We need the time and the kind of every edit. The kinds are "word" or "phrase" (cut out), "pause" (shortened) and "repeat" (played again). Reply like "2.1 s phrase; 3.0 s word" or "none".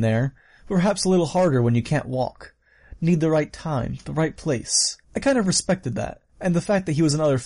5.0 s pause; 6.3 s pause